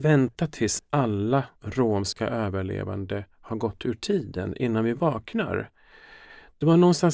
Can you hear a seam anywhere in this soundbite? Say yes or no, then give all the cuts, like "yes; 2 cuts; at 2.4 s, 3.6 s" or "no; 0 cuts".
yes; 1 cut; at 1.5 s